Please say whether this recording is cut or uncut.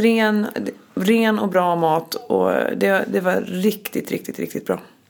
uncut